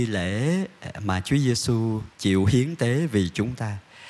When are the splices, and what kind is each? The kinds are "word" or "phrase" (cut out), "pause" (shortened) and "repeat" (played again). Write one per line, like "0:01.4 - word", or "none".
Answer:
0:02.1 - pause